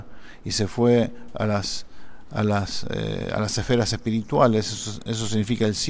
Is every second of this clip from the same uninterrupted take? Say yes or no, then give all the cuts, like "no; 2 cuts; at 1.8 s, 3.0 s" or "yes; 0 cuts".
yes; 0 cuts